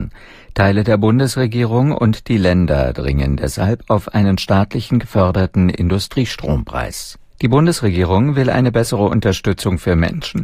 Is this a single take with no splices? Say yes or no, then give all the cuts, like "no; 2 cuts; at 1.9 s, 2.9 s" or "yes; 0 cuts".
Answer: no; 1 cut; at 7.3 s